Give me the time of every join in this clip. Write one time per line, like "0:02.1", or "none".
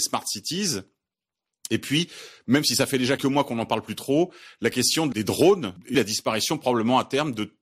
0:03.2
0:05.9